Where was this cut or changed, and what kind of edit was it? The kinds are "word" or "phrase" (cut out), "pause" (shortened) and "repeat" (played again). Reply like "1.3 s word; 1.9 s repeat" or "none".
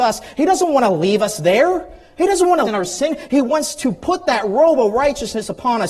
2.6 s phrase